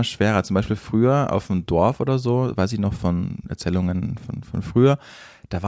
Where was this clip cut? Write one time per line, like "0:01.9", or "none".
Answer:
none